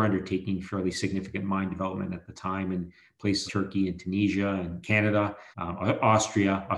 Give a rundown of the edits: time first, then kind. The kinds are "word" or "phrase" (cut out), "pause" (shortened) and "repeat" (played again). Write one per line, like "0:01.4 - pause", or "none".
0:03.5 - word
0:04.8 - word
0:05.5 - pause